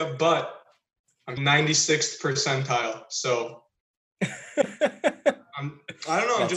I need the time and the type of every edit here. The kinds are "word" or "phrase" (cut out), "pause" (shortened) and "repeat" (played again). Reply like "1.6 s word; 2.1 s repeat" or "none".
1.4 s word